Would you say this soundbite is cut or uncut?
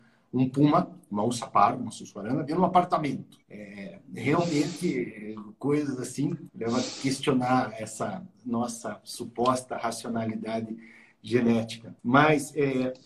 cut